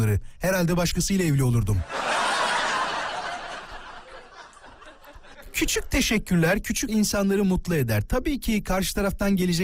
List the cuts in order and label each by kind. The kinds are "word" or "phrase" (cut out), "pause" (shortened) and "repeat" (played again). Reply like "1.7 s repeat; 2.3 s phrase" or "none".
6.9 s word